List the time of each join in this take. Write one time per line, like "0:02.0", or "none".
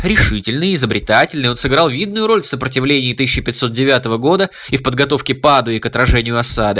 none